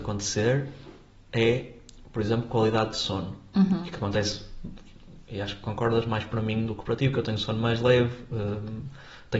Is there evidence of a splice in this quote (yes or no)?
no